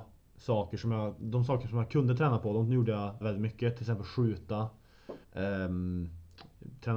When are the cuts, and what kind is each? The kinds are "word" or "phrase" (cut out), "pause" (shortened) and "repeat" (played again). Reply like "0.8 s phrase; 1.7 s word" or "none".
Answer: 3.2 s word; 5.2 s pause